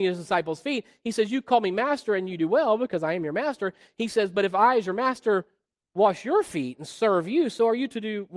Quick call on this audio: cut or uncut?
uncut